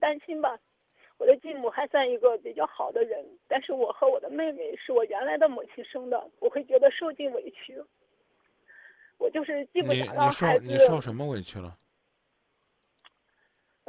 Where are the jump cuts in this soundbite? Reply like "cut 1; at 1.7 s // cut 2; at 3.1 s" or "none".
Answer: cut 1; at 6.4 s